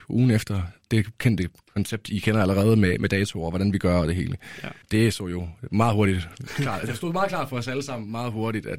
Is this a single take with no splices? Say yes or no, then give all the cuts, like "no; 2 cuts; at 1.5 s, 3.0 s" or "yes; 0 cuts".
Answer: no; 1 cut; at 4.8 s